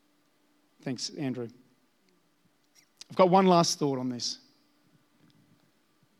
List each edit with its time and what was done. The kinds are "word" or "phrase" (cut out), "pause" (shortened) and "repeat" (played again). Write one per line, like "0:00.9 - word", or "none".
none